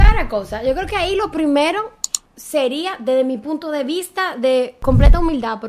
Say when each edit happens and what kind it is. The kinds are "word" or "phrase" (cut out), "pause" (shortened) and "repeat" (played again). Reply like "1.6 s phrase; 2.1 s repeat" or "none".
none